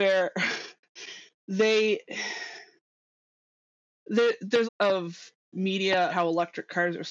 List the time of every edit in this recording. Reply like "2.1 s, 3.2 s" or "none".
4.6 s, 6.1 s